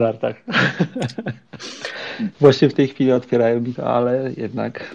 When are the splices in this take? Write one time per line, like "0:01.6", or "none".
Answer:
0:02.3
0:03.8